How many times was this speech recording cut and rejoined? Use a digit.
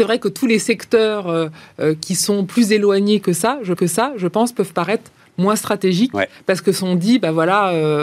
1